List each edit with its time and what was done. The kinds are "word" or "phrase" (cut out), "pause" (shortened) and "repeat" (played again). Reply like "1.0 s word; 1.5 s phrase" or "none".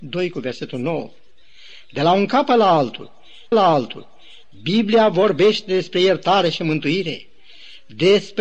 3.5 s repeat